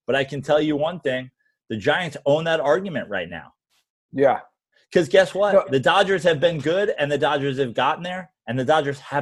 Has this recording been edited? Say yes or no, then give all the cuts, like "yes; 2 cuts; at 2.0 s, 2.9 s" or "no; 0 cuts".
no; 0 cuts